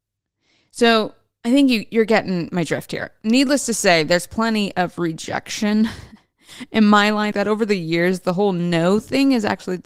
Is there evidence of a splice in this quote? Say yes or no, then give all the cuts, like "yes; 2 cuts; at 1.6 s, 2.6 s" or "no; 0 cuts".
yes; 1 cut; at 7.3 s